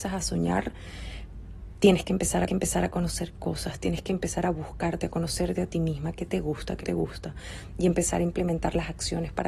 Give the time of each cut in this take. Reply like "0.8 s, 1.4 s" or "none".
2.5 s, 6.8 s